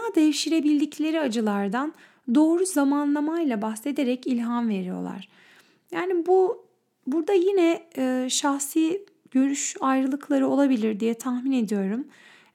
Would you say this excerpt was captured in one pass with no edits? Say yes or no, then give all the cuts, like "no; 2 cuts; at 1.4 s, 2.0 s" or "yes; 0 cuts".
yes; 0 cuts